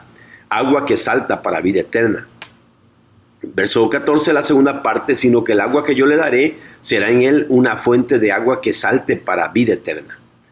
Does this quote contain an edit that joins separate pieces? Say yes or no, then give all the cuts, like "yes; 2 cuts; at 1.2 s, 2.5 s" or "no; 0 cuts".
no; 0 cuts